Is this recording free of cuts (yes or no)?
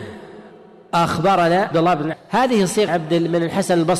no